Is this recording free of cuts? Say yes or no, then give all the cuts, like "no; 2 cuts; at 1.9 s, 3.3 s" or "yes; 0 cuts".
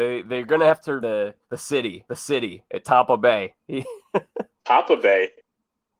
no; 4 cuts; at 1.0 s, 1.4 s, 2.1 s, 4.5 s